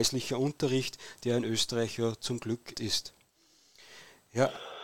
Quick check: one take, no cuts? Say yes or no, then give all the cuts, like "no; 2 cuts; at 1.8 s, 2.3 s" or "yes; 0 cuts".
no; 1 cut; at 2.7 s